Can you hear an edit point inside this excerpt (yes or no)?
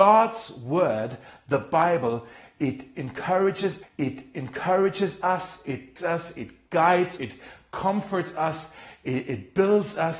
yes